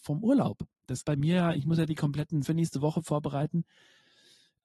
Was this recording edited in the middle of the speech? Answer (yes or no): yes